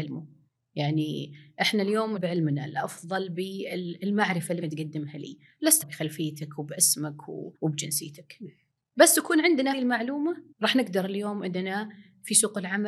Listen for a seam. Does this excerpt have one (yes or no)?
yes